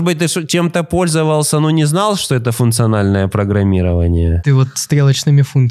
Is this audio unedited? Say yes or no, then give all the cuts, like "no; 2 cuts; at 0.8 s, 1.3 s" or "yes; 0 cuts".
yes; 0 cuts